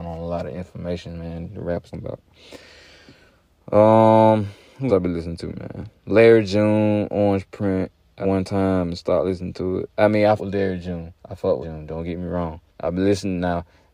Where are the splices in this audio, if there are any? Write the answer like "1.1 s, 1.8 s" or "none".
1.9 s, 4.9 s, 8.2 s, 10.4 s, 11.2 s, 11.6 s, 12.7 s